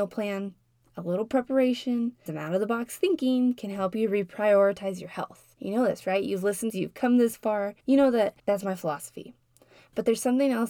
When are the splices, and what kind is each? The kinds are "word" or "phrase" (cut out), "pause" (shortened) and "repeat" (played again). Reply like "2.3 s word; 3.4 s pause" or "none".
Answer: 2.3 s word; 5.5 s pause; 6.7 s phrase; 7.8 s pause; 8.4 s pause

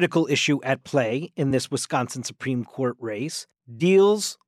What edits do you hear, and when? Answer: none

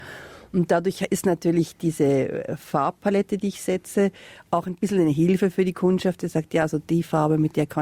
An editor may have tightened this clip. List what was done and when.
none

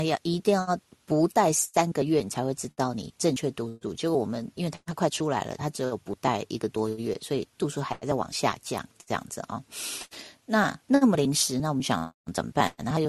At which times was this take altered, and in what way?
10.8 s pause

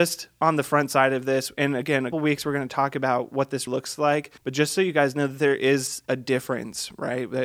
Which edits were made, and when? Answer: 2.1 s word; 3.7 s word; 4.4 s pause

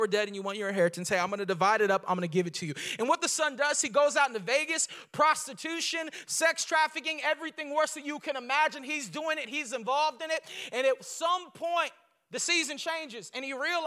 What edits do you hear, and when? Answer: none

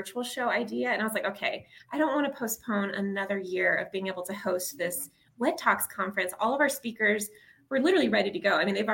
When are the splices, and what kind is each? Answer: none

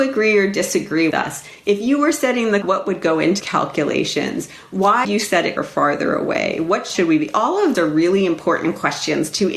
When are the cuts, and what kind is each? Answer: 1.1 s word; 2.6 s word; 3.4 s word; 5.0 s word; 5.6 s word; 6.9 s word; 7.7 s word

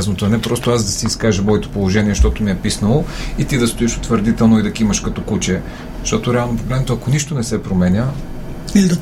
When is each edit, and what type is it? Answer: none

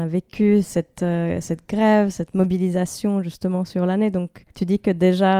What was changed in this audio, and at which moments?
4.5 s pause

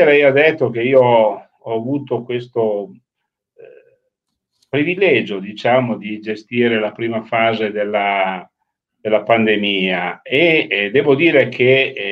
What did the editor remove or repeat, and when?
none

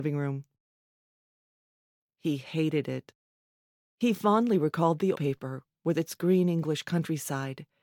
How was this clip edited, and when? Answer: 5.1 s word

